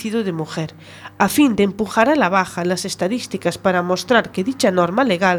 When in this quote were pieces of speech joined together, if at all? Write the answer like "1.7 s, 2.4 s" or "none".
none